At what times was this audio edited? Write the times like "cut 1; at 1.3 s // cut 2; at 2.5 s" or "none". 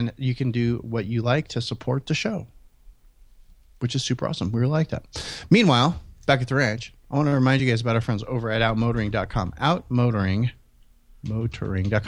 none